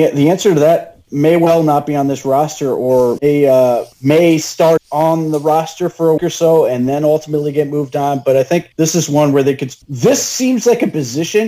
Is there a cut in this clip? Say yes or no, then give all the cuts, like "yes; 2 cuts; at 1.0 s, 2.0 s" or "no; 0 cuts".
yes; 7 cuts; at 1.0 s, 3.2 s, 3.9 s, 4.8 s, 6.2 s, 8.7 s, 9.8 s